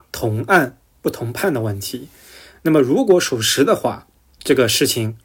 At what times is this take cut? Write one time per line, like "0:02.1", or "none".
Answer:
none